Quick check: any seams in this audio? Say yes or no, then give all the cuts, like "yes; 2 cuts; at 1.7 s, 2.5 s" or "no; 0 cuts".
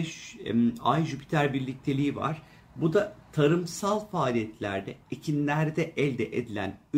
no; 0 cuts